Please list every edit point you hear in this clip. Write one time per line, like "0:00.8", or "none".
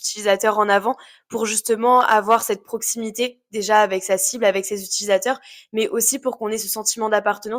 none

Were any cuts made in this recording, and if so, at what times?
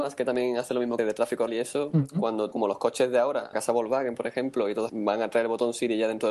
0:01.0
0:01.5
0:02.5
0:03.5
0:04.9

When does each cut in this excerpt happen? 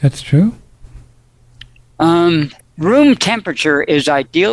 0:02.6

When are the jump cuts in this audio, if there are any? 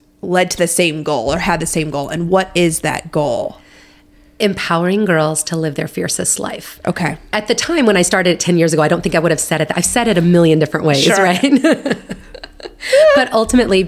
none

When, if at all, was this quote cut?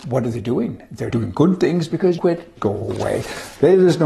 0:01.1
0:02.2
0:02.6

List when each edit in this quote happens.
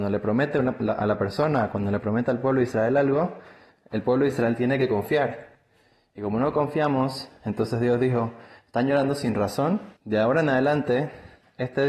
0:10.0

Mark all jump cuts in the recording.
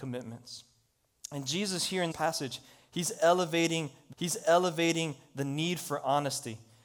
0:02.1
0:04.1

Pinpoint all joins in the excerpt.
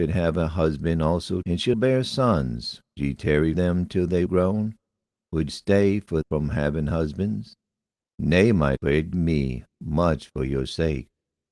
0:01.4
0:01.7
0:03.0
0:03.5
0:04.3
0:05.5
0:06.2
0:08.8
0:09.1

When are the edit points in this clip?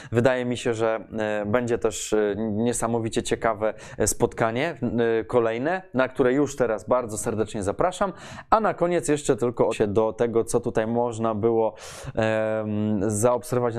0:09.7

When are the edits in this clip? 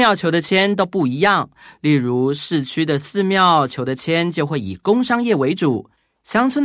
none

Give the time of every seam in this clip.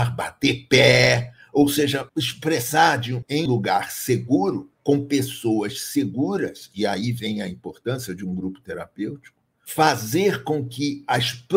0:03.5
0:04.7

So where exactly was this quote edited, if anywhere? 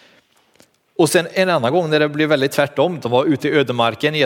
none

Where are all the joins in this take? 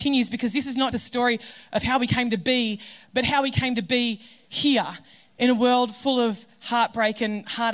0:00.9

